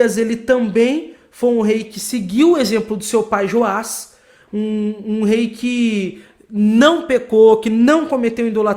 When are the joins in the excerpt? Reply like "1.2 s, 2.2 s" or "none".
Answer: none